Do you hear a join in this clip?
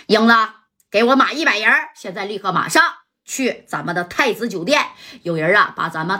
no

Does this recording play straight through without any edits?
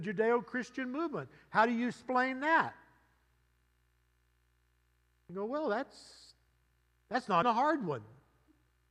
no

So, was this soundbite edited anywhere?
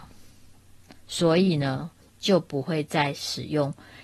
yes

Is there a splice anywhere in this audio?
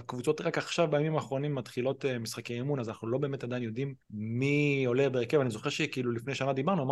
yes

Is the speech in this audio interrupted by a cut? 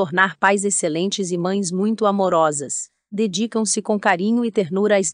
no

